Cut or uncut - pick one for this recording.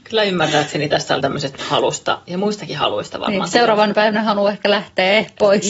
cut